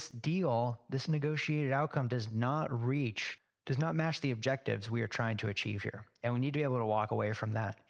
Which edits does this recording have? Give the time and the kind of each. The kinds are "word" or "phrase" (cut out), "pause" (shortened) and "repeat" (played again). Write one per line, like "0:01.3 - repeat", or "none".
none